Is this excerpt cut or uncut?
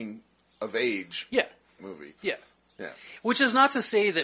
cut